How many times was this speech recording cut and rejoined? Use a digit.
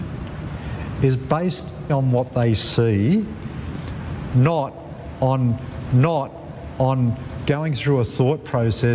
2